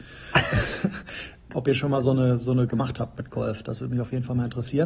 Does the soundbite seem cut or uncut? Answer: cut